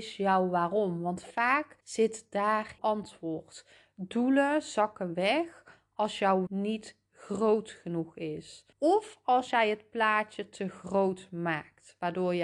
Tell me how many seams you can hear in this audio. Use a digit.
4